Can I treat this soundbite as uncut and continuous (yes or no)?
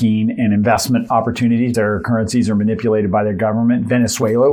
no